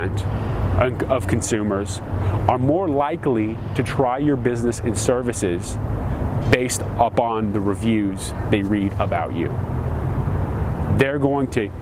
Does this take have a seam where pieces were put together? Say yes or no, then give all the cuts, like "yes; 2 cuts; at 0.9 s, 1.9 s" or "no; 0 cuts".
no; 0 cuts